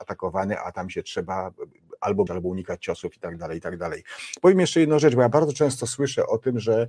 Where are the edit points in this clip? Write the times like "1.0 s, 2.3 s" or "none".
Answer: 2.3 s